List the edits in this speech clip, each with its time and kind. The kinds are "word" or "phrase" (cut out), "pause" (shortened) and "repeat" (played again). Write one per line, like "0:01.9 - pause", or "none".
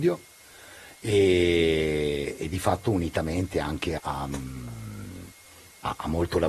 0:04.0 - word